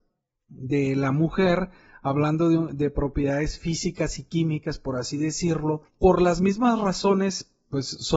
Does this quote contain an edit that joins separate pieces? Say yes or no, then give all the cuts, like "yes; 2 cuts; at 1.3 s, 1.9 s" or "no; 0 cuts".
no; 0 cuts